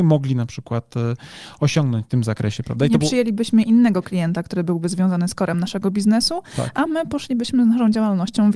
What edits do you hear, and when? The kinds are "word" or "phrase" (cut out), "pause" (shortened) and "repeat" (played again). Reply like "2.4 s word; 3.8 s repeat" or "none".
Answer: none